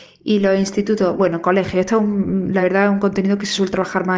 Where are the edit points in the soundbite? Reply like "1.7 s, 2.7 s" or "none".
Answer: none